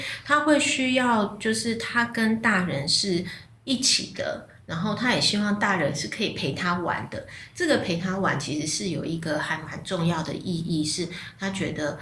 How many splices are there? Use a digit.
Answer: 0